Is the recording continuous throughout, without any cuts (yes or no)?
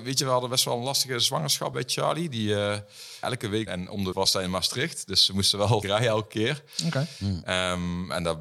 no